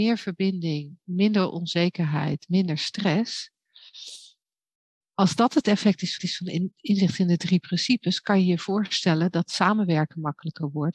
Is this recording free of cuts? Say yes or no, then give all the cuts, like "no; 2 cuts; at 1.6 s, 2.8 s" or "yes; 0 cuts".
no; 1 cut; at 6.2 s